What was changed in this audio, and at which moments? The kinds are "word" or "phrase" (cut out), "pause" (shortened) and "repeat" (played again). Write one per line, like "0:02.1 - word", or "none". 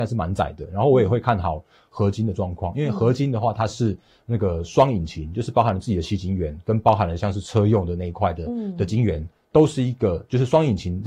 none

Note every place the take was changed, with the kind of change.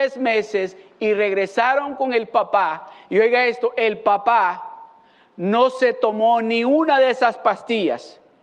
none

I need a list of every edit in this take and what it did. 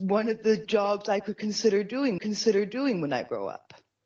0:02.2 - repeat

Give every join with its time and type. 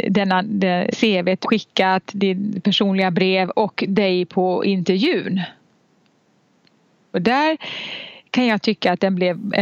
0:00.9 - word
0:01.4 - word

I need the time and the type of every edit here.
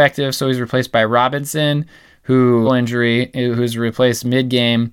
0:02.6 - phrase

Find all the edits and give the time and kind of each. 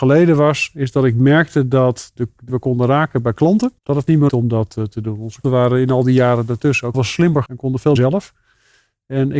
0:02.2 - word
0:02.5 - phrase
0:03.8 - pause
0:04.3 - word
0:05.4 - word
0:06.9 - word
0:07.5 - word
0:08.0 - word

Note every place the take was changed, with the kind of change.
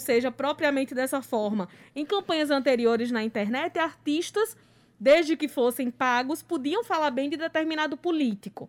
none

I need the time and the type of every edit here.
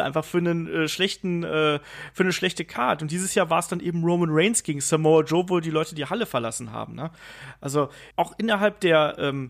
0:08.1 - pause

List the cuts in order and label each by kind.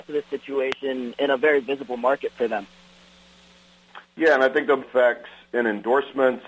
0:04.8 - phrase

